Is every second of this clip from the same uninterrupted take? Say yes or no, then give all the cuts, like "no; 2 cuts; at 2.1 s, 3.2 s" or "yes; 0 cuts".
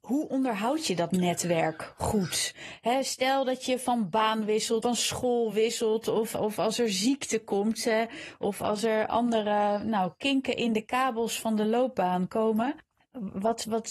no; 1 cut; at 4.8 s